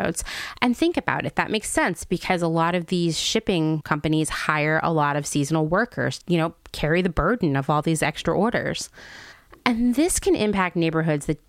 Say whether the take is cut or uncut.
cut